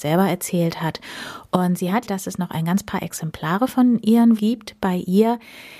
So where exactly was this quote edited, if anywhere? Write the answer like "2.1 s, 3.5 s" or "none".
2.1 s, 4.4 s